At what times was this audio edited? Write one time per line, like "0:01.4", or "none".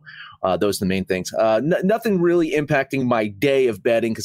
none